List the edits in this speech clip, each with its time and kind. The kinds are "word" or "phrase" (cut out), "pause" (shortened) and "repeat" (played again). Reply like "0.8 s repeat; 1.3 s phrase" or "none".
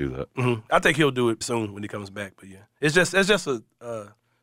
1.4 s word